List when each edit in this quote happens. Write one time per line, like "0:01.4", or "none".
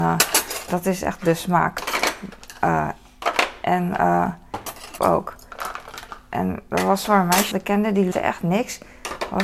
0:05.0
0:07.1
0:07.5
0:08.1